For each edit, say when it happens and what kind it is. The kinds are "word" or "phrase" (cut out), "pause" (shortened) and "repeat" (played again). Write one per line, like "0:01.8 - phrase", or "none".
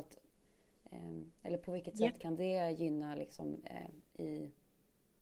0:01.3 - pause

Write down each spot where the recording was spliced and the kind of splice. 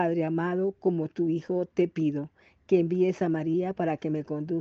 none

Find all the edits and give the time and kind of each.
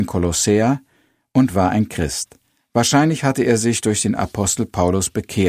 none

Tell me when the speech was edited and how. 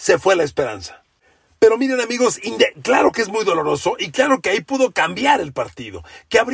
none

